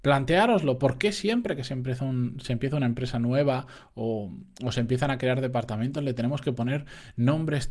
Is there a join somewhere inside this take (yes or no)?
no